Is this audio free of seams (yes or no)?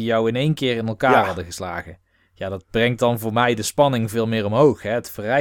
yes